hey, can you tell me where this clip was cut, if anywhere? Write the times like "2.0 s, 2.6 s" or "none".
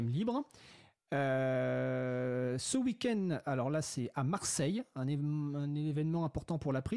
none